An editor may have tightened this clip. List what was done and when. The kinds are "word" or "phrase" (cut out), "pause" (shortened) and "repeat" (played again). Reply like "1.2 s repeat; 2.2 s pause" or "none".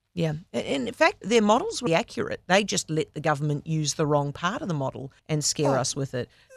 1.2 s word; 1.9 s word; 5.2 s pause